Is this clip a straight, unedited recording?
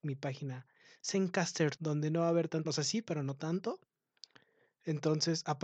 no; 2 cuts; at 1.8 s, 2.6 s

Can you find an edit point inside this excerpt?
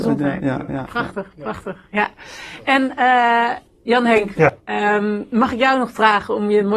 no; 0 cuts

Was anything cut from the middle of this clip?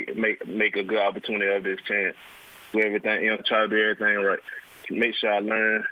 yes; 3 cuts; at 2.7 s, 3.4 s, 4.8 s

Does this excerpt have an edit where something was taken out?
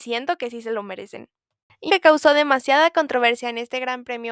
yes; 1 cut; at 1.9 s

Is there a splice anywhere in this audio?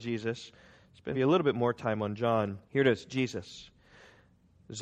yes; 2 cuts; at 1.1 s, 2.7 s

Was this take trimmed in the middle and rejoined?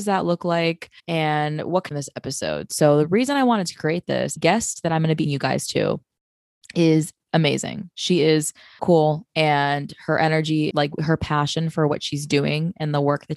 yes; 6 cuts; at 1.0 s, 1.9 s, 4.4 s, 5.2 s, 8.8 s, 10.7 s

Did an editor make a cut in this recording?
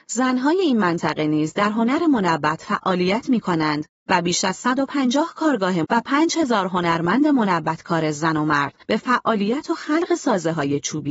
yes; 2 cuts; at 5.8 s, 8.8 s

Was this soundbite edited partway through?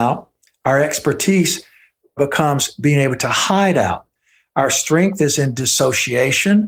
no; 0 cuts

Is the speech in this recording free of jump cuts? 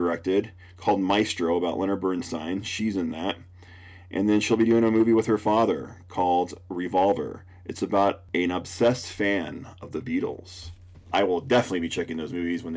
yes; 0 cuts

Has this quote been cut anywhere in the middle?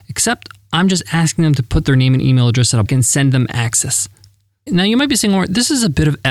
yes; 1 cut; at 2.9 s

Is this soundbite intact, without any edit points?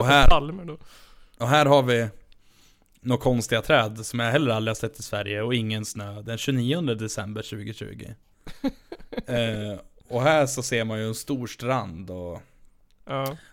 yes; 0 cuts

